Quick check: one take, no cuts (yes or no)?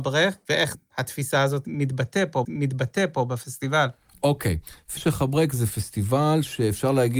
no